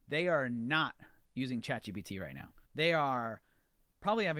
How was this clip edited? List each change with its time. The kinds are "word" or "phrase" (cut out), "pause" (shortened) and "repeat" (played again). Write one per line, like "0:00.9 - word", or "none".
0:02.7 - pause